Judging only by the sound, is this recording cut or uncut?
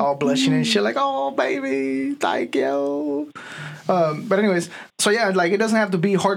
cut